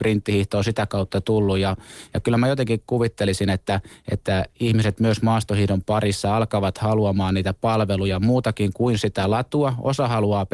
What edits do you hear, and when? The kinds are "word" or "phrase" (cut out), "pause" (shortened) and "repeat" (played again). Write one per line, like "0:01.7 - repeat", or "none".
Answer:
none